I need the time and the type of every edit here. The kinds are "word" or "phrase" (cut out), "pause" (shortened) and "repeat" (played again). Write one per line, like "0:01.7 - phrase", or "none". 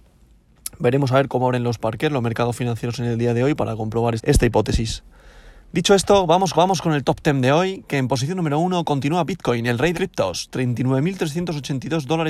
0:04.2 - word
0:06.5 - repeat
0:09.9 - phrase

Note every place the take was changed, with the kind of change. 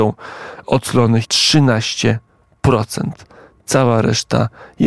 0:01.2 - word

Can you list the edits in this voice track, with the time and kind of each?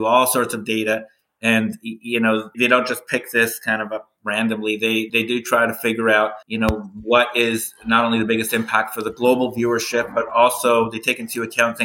0:02.5 - word
0:05.1 - word
0:06.4 - pause

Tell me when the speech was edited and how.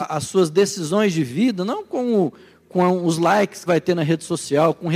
0:03.7 - word

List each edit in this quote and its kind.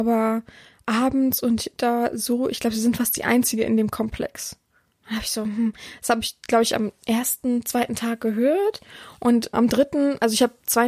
0:09.5 - word

